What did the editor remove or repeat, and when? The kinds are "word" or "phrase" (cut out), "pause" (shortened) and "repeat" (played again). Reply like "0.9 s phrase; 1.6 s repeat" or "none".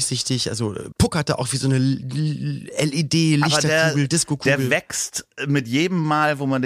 0.9 s word